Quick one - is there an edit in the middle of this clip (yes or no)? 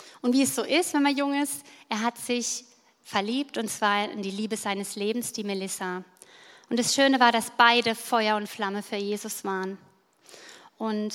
no